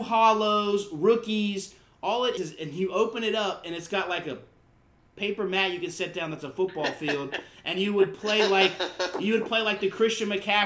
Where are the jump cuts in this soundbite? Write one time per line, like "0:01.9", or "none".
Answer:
0:02.4